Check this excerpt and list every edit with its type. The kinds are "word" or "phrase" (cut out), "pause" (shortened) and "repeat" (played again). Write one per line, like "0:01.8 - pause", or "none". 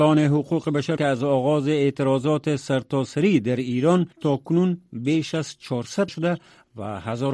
0:01.0 - word
0:04.1 - pause
0:06.1 - phrase